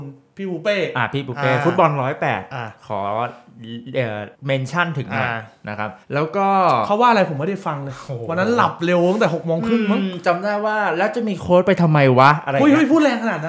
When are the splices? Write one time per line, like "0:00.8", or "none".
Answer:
0:04.4
0:06.0